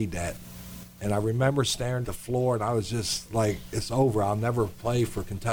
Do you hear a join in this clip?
yes; 1 cut; at 2.0 s

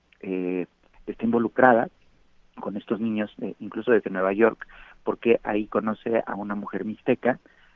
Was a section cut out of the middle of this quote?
no; 0 cuts

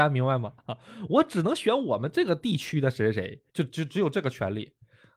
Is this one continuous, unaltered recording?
no; 1 cut; at 3.5 s

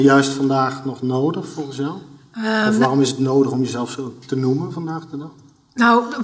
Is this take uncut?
yes; 0 cuts

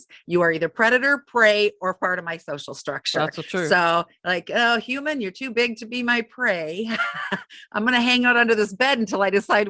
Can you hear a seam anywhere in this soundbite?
no; 0 cuts

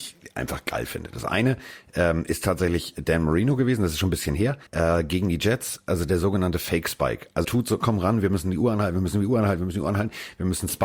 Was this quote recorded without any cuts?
no; 3 cuts; at 4.7 s, 7.4 s, 7.8 s

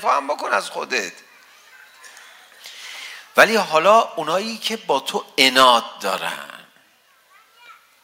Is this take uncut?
yes; 0 cuts

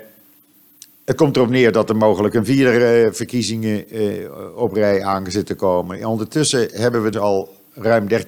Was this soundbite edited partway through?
yes; 1 cut; at 7.1 s

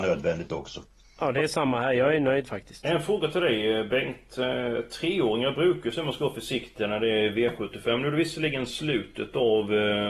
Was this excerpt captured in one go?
yes; 0 cuts

